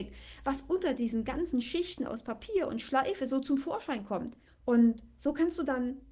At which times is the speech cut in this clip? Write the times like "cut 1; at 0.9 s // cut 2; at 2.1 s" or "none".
cut 1; at 4.5 s